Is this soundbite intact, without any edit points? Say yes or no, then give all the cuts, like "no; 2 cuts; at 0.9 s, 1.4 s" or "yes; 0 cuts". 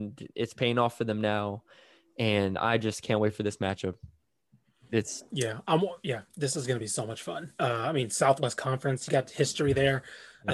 yes; 0 cuts